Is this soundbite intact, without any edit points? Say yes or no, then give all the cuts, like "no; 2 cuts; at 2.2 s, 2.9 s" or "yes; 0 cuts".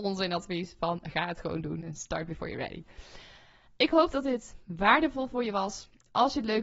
yes; 0 cuts